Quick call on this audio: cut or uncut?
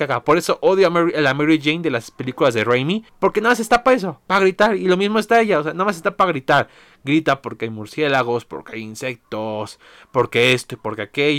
cut